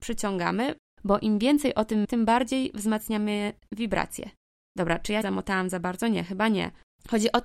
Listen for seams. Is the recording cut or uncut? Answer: cut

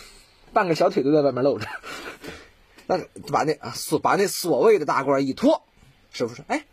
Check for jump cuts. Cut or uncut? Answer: uncut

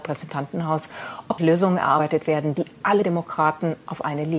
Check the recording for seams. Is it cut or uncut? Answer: cut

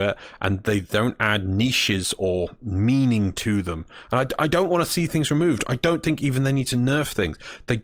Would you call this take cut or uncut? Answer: uncut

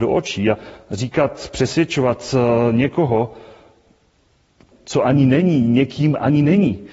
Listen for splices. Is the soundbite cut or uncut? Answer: cut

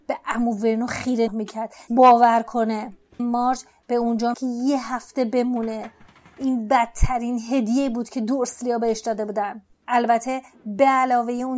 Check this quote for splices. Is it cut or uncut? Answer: cut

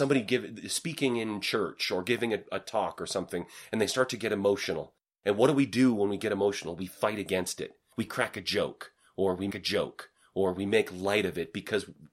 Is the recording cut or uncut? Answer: cut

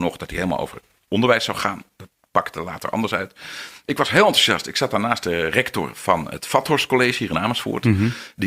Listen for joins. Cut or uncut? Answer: uncut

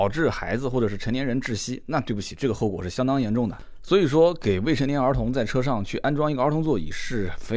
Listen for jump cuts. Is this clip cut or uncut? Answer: uncut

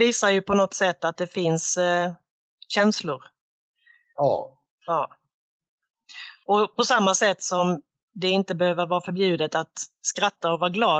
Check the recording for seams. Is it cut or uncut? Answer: uncut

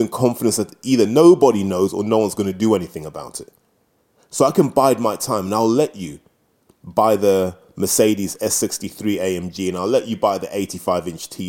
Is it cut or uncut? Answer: uncut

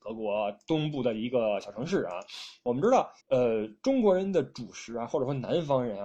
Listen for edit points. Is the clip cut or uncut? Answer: cut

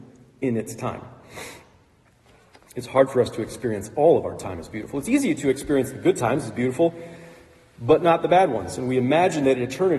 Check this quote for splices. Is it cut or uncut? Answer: uncut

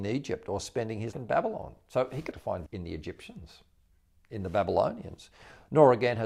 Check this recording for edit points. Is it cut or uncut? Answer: cut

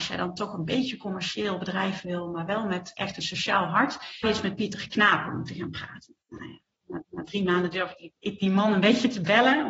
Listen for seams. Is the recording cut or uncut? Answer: cut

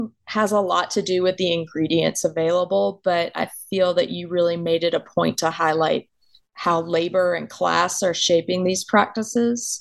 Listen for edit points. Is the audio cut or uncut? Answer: uncut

